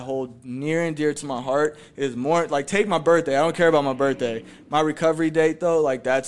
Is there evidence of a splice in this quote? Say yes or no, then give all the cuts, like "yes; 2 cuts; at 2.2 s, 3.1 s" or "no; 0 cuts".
no; 0 cuts